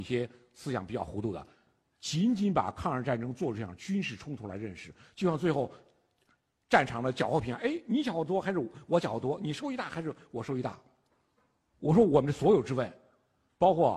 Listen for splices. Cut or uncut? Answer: uncut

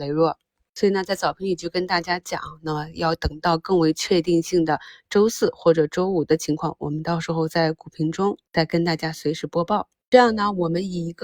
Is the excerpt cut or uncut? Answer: cut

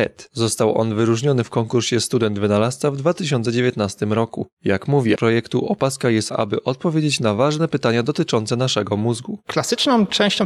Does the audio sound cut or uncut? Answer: cut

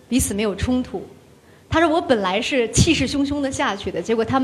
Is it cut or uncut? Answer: uncut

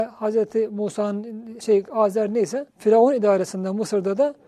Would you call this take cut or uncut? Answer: cut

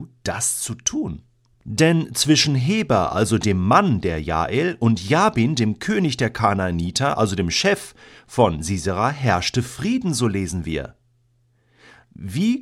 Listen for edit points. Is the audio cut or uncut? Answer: uncut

